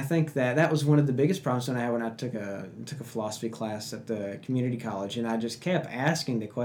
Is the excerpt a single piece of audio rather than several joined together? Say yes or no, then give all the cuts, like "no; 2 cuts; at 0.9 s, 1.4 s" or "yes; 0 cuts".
yes; 0 cuts